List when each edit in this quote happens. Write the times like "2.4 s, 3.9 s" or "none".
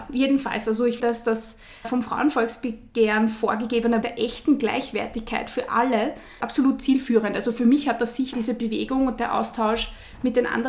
1.0 s, 1.8 s, 4.0 s, 8.3 s